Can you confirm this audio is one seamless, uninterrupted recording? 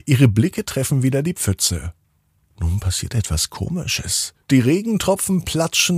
no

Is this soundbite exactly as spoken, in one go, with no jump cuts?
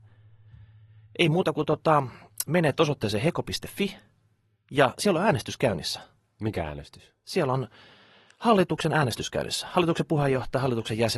yes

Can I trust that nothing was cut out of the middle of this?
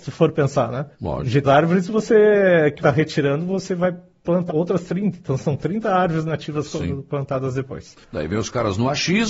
no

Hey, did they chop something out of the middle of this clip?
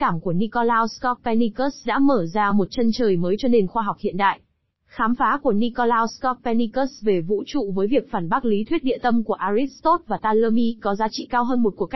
no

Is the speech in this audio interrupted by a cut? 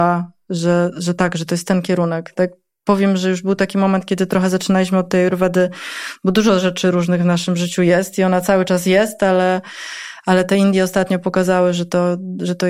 no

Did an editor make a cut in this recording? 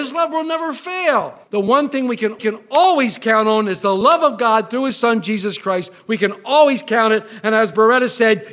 yes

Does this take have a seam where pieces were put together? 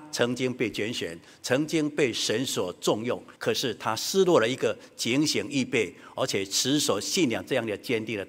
yes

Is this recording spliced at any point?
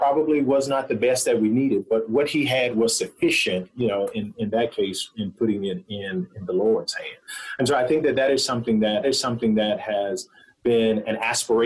yes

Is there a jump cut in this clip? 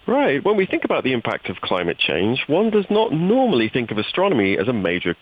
no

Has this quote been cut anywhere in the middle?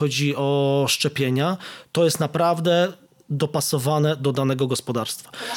no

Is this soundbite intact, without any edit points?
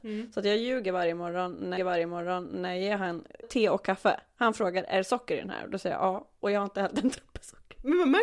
no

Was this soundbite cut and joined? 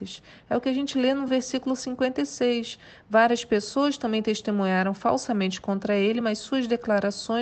no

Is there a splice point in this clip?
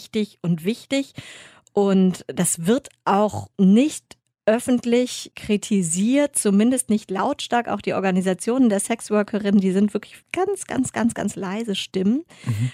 yes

